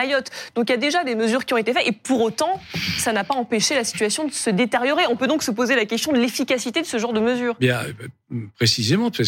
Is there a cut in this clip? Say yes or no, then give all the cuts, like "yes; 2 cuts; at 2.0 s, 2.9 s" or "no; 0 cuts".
no; 0 cuts